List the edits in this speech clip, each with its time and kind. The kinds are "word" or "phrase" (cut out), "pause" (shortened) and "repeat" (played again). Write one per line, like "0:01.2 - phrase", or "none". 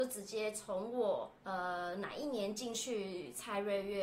0:01.4 - pause